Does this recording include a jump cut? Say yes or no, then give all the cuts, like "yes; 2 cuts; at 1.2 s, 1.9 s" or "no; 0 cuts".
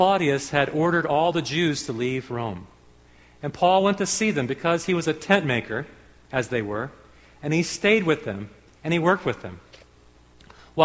no; 0 cuts